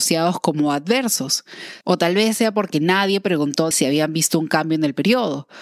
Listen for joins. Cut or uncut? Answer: cut